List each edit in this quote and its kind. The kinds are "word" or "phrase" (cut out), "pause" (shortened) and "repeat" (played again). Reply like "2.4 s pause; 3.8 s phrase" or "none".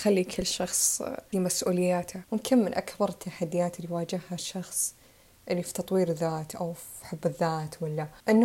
1.3 s word

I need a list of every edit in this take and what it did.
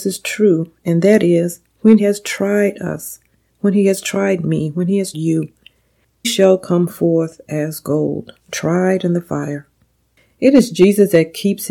2.0 s word; 5.1 s word; 6.2 s word; 8.4 s pause

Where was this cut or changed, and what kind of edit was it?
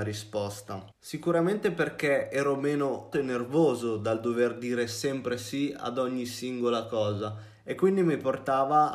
0.9 s pause; 3.1 s word

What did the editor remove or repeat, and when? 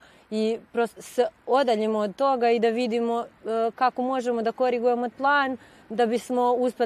1.0 s word; 5.1 s word

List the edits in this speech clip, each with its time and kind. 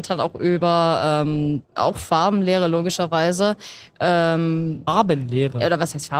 1.6 s pause

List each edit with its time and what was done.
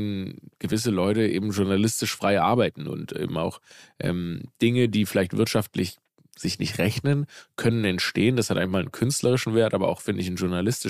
none

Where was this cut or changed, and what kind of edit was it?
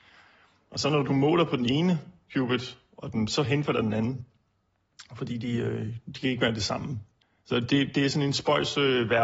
7.2 s pause

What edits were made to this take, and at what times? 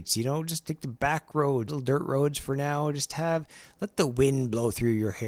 1.7 s word

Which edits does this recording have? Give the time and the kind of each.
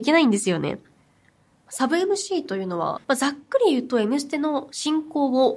3.0 s pause

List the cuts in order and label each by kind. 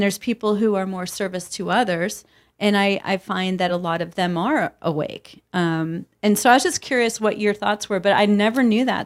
none

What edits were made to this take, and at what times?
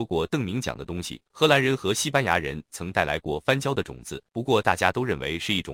1.3 s pause; 4.3 s pause

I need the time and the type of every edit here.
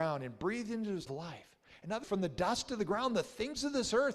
1.1 s phrase; 2.0 s word

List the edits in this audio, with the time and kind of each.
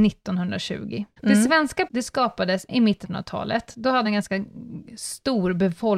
1.2 s pause; 1.9 s word; 2.7 s phrase; 3.0 s word; 4.0 s word

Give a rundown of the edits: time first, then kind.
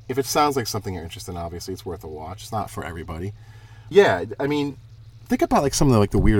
3.9 s word

